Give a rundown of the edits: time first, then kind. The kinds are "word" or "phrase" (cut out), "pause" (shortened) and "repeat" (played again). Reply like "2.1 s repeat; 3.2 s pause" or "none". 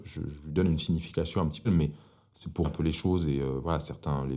1.6 s word; 2.6 s word